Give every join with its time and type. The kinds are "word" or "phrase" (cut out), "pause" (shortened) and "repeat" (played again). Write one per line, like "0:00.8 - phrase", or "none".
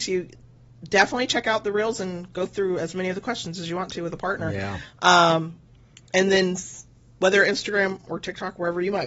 none

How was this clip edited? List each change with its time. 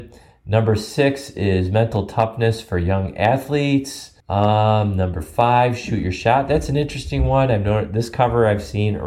0:04.2 - pause

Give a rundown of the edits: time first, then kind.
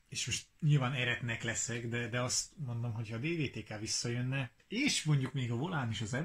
0:04.6 - pause

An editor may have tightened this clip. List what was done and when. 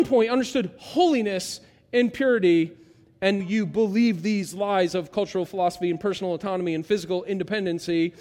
0:03.4 - word

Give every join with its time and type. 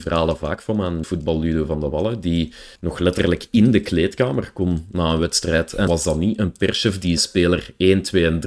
0:01.0 - word
0:02.8 - pause
0:05.9 - word
0:07.2 - word

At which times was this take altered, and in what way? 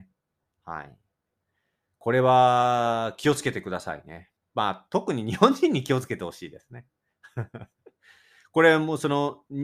0:04.4 - pause

